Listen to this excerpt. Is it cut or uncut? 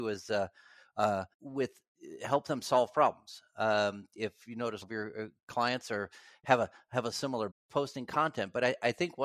cut